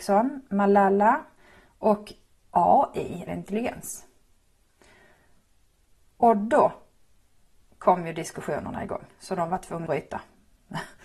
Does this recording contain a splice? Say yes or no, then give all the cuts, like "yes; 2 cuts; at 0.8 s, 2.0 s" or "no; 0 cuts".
yes; 2 cuts; at 3.3 s, 9.9 s